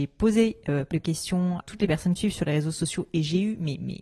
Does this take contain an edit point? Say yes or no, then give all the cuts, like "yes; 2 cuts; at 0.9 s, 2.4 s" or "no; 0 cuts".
yes; 3 cuts; at 0.9 s, 1.6 s, 2.2 s